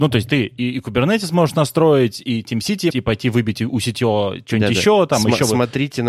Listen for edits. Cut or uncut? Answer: cut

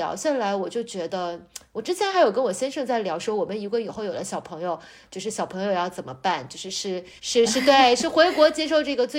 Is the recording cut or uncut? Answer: cut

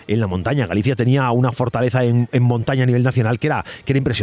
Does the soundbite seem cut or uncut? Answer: uncut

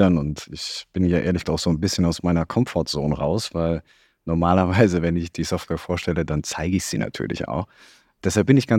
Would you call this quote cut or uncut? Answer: cut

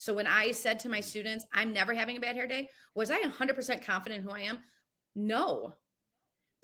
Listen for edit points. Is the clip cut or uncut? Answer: uncut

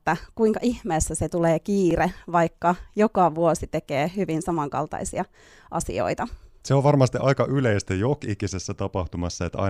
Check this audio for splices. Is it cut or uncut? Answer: uncut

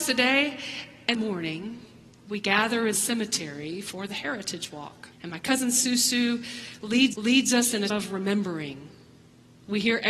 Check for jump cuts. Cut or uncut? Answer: cut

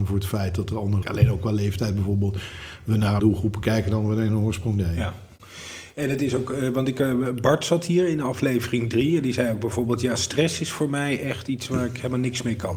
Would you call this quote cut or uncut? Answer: cut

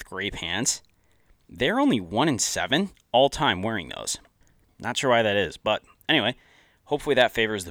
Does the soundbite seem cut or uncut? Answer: uncut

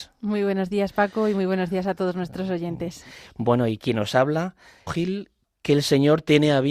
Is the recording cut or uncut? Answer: cut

